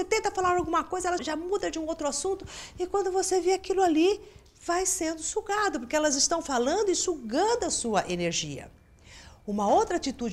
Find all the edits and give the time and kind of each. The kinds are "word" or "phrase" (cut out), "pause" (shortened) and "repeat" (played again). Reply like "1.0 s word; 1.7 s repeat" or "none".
1.2 s word